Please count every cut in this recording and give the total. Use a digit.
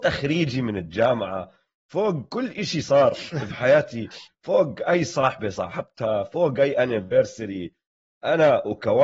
0